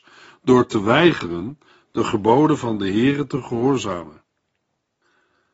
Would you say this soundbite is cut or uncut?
uncut